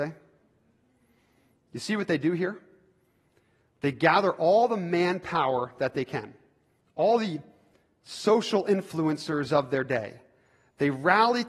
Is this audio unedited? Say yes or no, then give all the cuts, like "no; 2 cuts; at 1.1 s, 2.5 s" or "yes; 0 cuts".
yes; 0 cuts